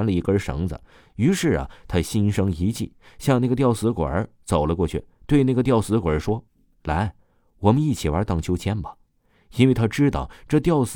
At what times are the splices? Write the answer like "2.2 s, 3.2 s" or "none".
6.5 s